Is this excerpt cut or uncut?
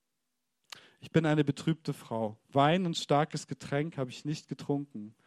uncut